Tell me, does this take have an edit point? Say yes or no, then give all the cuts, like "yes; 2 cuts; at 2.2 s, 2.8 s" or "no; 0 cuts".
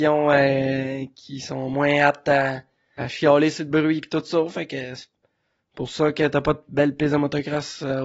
yes; 2 cuts; at 1.1 s, 3.0 s